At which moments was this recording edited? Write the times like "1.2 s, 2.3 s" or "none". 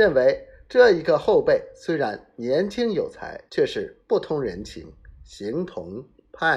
3.5 s